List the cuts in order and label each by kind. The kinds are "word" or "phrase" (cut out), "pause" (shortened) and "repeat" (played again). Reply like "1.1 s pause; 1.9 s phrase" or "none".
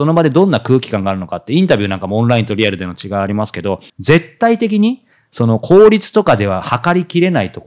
3.9 s pause; 5.1 s pause

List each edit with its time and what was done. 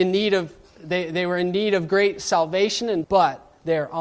3.0 s word

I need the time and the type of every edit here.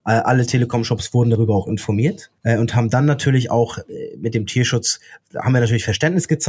none

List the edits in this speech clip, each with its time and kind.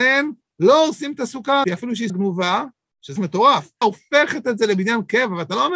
1.6 s word; 2.1 s word; 3.2 s word; 3.8 s word

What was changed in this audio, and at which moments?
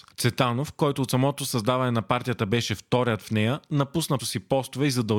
4.2 s word

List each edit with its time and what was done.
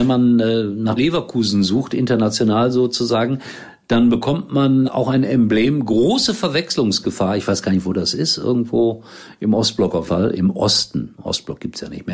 1.0 s word; 4.8 s word; 10.1 s word

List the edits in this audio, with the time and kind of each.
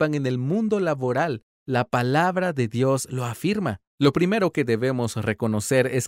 3.9 s pause

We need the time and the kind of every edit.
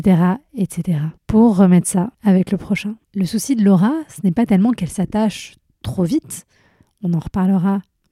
1.2 s pause; 2.1 s pause; 3.0 s pause

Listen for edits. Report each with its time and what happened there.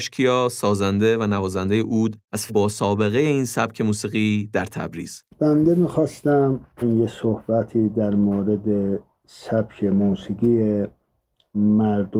2.5 s word; 5.3 s pause; 6.8 s word

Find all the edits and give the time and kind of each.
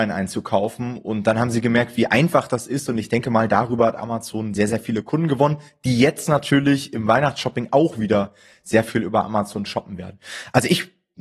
none

